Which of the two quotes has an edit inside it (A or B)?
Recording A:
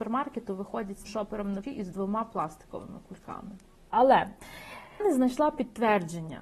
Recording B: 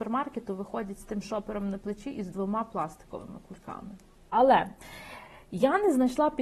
A